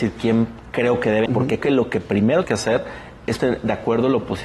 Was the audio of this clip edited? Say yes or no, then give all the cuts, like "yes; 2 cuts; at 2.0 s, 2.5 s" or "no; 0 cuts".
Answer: yes; 4 cuts; at 1.3 s, 1.6 s, 2.4 s, 3.4 s